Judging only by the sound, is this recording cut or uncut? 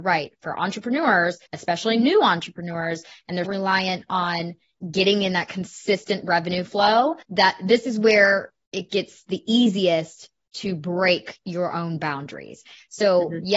cut